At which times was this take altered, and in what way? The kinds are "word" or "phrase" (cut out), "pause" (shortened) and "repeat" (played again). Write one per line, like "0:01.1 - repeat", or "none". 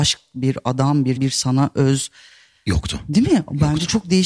0:01.2 - word